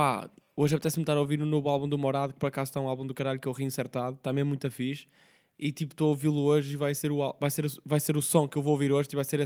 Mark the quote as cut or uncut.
uncut